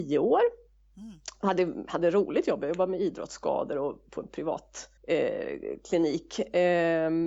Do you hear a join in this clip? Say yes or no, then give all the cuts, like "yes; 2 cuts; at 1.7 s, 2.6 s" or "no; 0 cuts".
yes; 1 cut; at 5.0 s